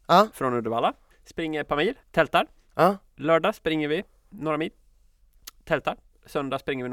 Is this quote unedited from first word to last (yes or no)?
no